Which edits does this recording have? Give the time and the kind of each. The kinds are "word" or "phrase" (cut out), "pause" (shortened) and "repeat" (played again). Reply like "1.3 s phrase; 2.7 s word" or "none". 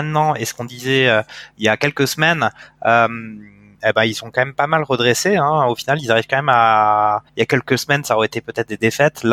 7.3 s pause